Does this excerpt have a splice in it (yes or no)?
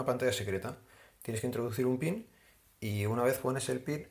no